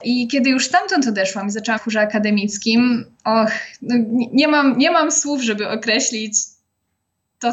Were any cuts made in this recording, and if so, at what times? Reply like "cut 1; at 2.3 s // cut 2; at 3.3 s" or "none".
cut 1; at 1.8 s